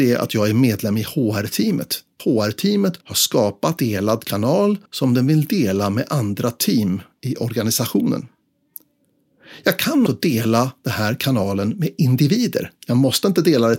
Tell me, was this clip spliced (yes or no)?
yes